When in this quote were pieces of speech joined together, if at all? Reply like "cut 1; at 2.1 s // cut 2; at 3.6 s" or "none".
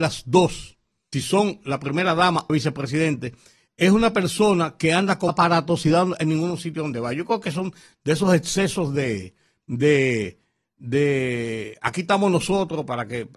cut 1; at 1.1 s // cut 2; at 2.5 s // cut 3; at 5.3 s

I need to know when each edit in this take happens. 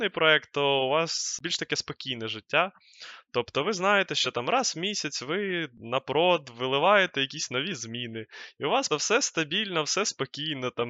cut 1; at 8.9 s

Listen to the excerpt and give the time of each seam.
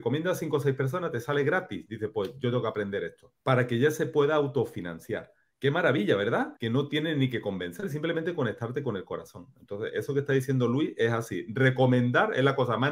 cut 1; at 3.4 s // cut 2; at 6.6 s

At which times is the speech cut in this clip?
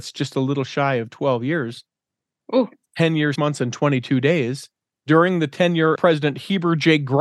cut 1; at 3.3 s // cut 2; at 5.9 s

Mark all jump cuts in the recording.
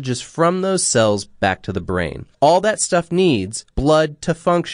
cut 1; at 2.3 s // cut 2; at 3.7 s

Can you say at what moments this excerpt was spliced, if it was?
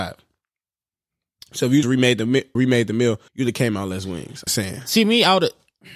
cut 1; at 1.8 s // cut 2; at 2.6 s // cut 3; at 3.3 s // cut 4; at 4.5 s

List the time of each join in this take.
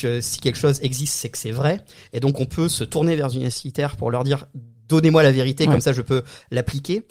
none

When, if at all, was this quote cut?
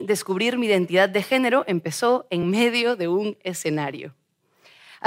none

